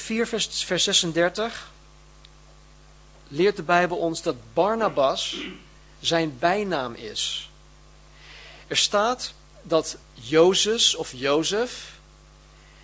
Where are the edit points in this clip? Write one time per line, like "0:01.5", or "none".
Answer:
0:10.0